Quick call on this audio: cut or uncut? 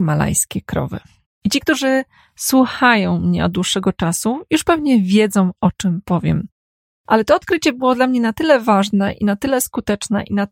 uncut